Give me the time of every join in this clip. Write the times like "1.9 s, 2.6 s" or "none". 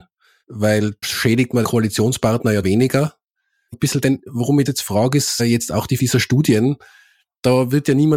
1.0 s, 1.6 s, 2.6 s, 3.7 s, 4.7 s, 5.4 s, 6.0 s

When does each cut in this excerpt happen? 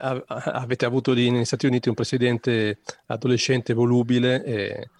none

